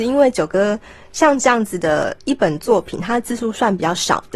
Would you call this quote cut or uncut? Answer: uncut